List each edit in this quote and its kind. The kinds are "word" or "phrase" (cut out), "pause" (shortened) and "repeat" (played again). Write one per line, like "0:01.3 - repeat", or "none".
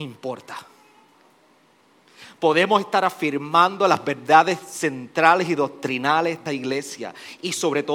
0:06.5 - word